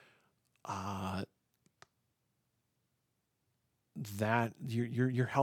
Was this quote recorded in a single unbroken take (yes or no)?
yes